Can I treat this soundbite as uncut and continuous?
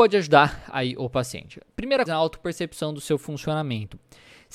no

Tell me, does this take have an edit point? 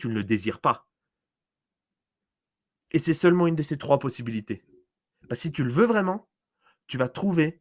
no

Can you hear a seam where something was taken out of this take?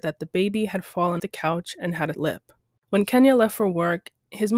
yes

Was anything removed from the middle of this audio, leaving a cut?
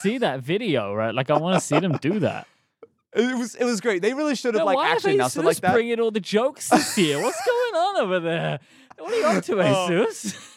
no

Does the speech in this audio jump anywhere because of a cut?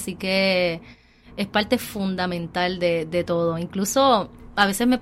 no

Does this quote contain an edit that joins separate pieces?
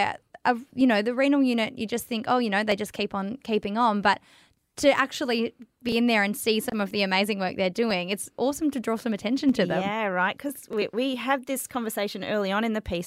no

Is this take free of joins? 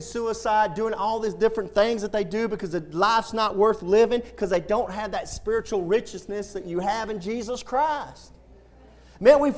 yes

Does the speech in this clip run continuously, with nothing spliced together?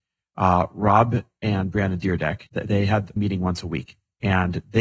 no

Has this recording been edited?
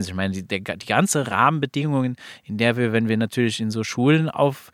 no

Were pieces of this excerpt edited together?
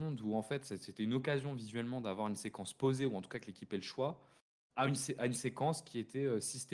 no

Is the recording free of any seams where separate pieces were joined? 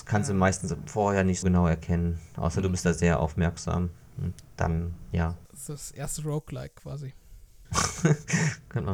no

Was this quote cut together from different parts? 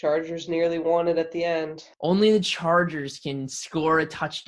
yes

